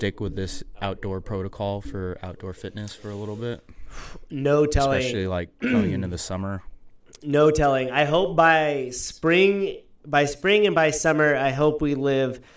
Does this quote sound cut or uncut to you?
uncut